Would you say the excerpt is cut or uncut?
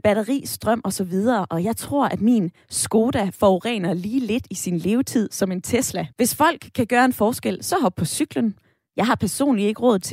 cut